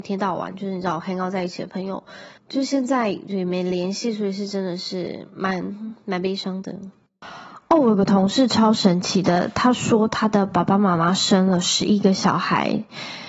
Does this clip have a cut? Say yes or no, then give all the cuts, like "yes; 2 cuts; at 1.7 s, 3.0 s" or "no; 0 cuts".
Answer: yes; 1 cut; at 2.4 s